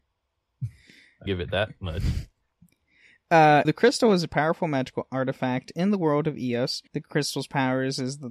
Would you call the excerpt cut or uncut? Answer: cut